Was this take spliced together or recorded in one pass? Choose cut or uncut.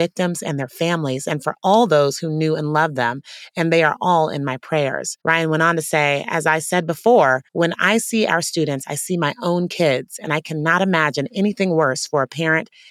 cut